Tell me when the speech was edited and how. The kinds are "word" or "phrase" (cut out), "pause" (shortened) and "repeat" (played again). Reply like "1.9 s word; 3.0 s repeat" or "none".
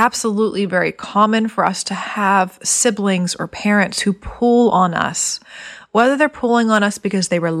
none